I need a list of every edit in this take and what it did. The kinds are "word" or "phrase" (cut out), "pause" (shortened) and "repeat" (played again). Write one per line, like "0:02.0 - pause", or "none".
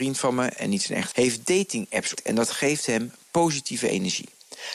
0:01.1 - word
0:02.1 - word